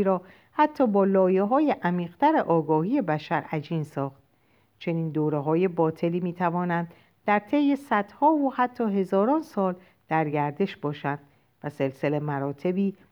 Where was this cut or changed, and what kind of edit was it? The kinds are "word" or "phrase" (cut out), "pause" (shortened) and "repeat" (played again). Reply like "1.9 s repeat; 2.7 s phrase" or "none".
none